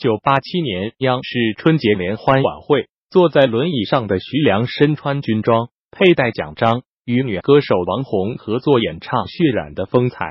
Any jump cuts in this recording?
no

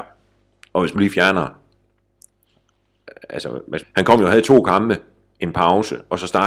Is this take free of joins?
no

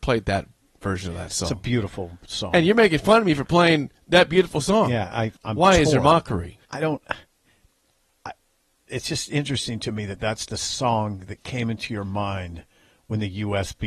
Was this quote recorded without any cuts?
no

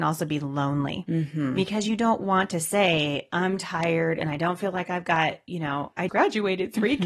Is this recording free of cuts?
no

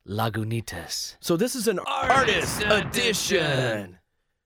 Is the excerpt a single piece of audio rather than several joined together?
yes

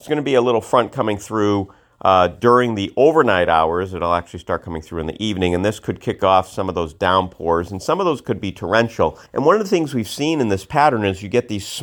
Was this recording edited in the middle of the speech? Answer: yes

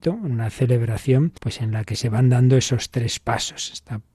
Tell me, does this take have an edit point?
yes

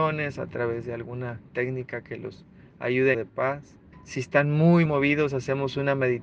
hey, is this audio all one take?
no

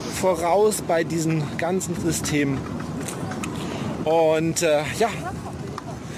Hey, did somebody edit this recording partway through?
yes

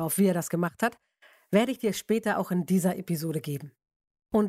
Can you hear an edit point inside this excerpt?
no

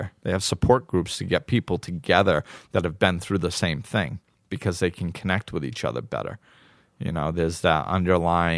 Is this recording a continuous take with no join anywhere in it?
yes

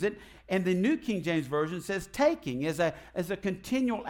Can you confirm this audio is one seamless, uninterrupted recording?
yes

